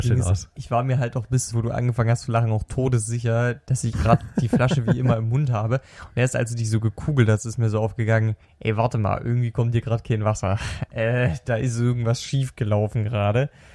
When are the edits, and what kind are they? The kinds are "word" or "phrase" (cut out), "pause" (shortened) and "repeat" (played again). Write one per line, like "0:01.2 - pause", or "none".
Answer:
0:01.5 - phrase
0:03.9 - word
0:08.4 - pause